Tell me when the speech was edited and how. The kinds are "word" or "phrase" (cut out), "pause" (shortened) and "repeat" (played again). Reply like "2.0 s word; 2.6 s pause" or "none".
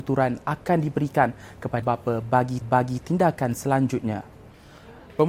1.8 s word; 2.6 s repeat

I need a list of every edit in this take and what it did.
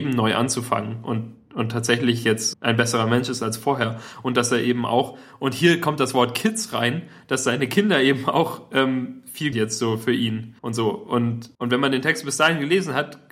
2.5 s word; 9.5 s phrase; 10.6 s pause; 11.5 s pause

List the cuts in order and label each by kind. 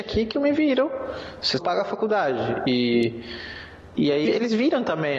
1.6 s word; 4.2 s word

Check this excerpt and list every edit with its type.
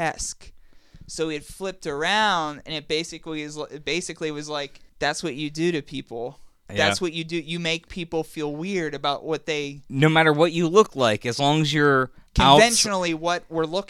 4.9 s pause; 12.3 s pause

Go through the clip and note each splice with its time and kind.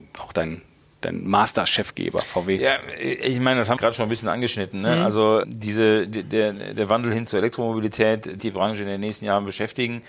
3.8 s phrase; 5.4 s word; 7.3 s word; 8.4 s phrase

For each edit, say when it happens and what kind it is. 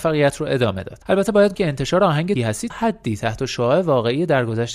1.0 s pause; 1.5 s word; 2.4 s word; 2.7 s word

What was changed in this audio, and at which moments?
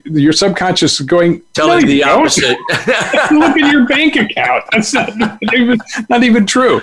none

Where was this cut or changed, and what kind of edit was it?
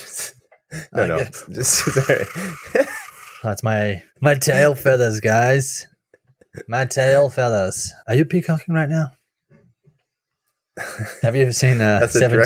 4.1 s pause; 8.0 s pause

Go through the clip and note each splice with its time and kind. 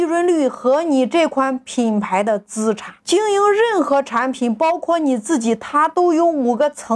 3.0 s pause

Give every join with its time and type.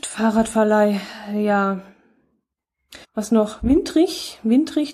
3.0 s pause

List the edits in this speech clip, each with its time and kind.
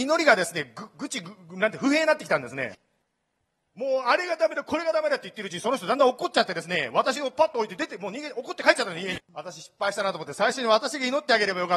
9.2 s pause

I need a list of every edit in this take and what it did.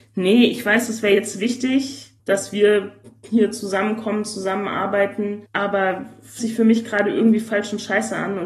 2.2 s pause; 5.5 s pause; 6.4 s word

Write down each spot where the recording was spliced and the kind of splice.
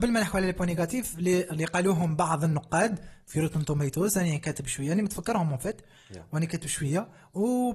none

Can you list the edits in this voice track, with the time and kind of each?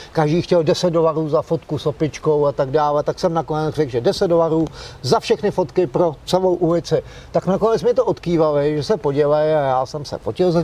none

